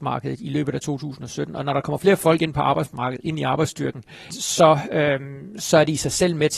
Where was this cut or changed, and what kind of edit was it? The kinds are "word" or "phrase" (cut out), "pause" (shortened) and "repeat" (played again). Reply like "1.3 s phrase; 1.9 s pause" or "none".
4.3 s word